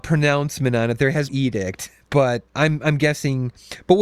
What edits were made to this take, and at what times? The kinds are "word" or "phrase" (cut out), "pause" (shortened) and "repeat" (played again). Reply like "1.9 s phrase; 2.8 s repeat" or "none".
1.3 s phrase; 2.5 s pause